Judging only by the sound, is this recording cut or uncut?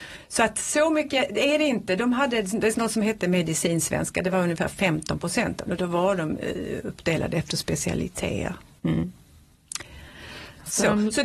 cut